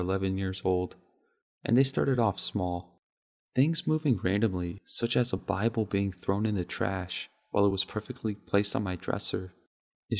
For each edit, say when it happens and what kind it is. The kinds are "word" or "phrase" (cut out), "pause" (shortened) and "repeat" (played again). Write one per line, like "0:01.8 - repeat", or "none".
none